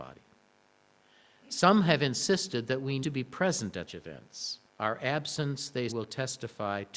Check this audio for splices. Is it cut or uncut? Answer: cut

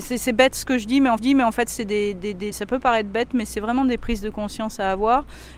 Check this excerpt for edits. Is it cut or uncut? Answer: cut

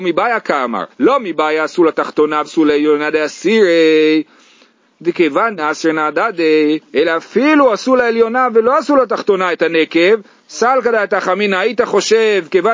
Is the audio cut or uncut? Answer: cut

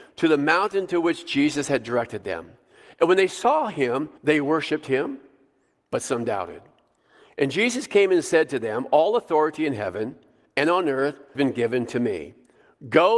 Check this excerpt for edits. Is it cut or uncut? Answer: cut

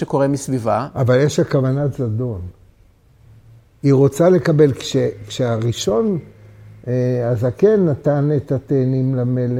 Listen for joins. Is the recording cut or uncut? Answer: uncut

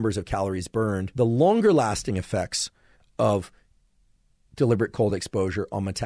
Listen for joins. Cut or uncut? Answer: uncut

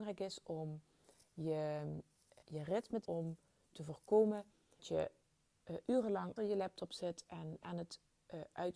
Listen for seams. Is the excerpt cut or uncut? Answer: cut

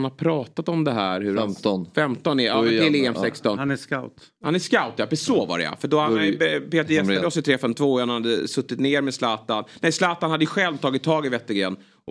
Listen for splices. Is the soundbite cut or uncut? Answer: uncut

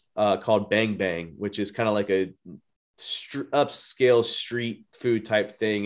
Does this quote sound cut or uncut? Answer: uncut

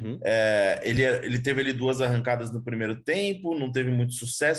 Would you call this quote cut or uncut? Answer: uncut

